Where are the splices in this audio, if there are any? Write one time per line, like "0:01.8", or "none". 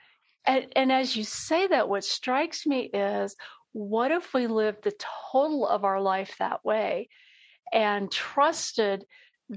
none